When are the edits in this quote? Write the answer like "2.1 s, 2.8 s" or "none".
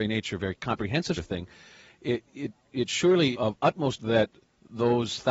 1.2 s, 3.3 s, 4.0 s